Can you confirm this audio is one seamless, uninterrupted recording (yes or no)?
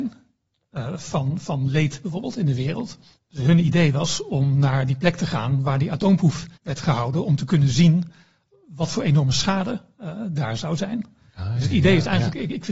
no